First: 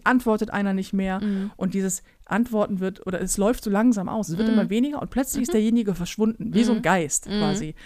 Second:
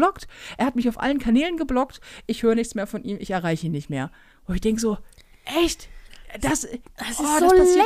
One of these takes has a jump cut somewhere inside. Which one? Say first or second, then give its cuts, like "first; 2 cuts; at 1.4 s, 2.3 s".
second; 1 cut; at 4.3 s